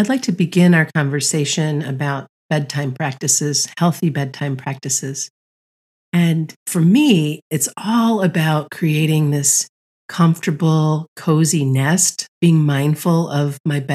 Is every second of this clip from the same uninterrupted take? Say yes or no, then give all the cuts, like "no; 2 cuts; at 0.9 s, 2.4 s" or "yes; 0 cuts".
no; 4 cuts; at 2.4 s, 6.6 s, 9.9 s, 12.3 s